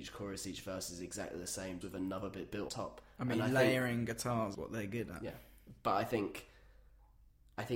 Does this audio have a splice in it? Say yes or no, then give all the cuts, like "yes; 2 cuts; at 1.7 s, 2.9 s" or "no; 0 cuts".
yes; 3 cuts; at 1.8 s, 2.7 s, 4.5 s